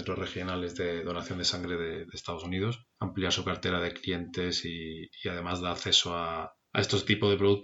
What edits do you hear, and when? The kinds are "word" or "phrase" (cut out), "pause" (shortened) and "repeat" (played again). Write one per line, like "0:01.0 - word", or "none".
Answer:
none

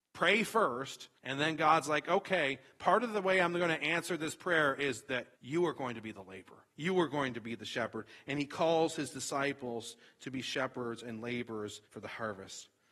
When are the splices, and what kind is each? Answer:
0:01.2 - pause
0:05.3 - pause
0:06.7 - pause
0:11.8 - pause

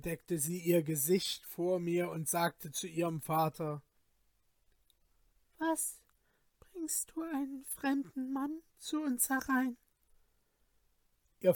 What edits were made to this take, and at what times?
none

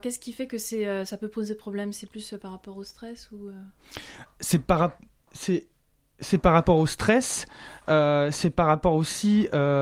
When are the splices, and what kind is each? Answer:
none

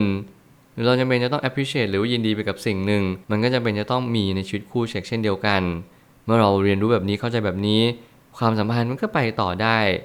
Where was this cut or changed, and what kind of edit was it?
0:03.2 - pause

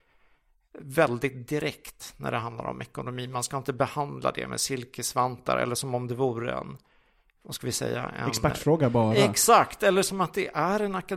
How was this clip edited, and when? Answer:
none

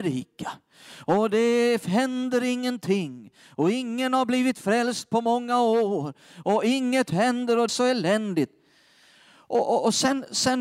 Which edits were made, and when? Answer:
0:07.7 - phrase

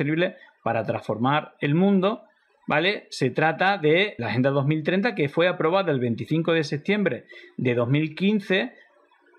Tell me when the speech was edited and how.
0:04.2 - word

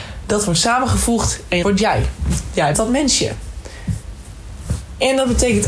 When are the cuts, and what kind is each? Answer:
0:01.6 - word
0:02.7 - word

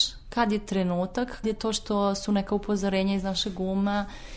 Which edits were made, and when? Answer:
0:01.4 - word

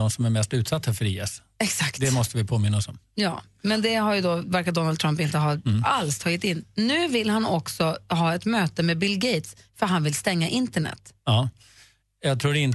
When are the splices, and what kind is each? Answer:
0:11.2 - pause

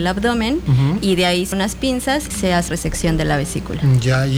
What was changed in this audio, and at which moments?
0:01.5 - word
0:02.3 - word
0:02.7 - word

